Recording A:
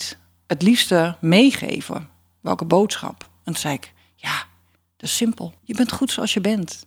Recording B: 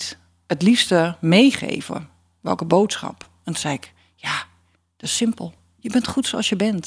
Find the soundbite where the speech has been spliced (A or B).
A